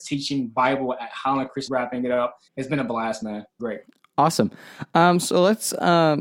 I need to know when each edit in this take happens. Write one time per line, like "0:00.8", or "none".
0:01.7
0:02.5
0:03.6